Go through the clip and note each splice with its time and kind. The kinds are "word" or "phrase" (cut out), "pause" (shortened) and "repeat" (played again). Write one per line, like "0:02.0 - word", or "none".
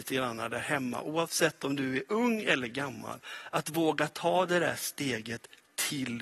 none